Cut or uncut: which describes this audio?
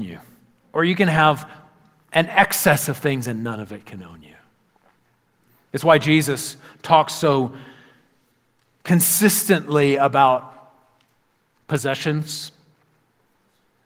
uncut